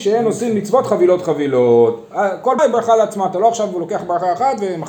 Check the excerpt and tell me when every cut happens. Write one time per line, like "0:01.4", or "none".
0:02.6